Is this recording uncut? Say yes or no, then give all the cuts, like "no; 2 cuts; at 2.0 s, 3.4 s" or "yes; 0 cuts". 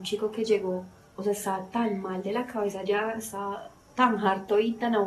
yes; 0 cuts